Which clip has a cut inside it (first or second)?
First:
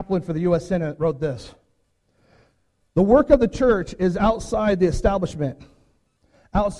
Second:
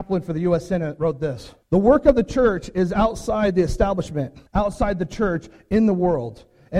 second